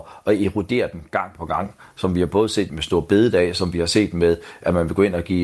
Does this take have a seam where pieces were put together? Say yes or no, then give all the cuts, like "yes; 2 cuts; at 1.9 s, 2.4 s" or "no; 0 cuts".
yes; 2 cuts; at 1.4 s, 2.7 s